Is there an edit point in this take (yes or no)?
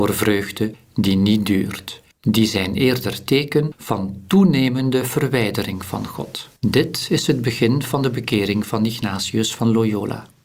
yes